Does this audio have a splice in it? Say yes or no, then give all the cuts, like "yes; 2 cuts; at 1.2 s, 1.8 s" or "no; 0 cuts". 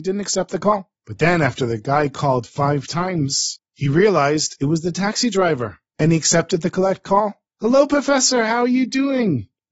no; 0 cuts